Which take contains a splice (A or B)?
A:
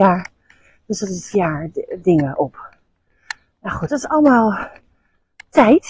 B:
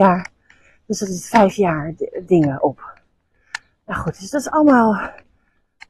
A